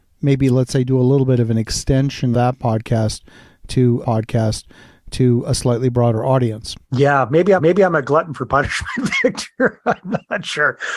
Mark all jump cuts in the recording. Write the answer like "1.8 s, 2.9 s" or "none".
2.3 s, 4.0 s, 6.8 s, 7.6 s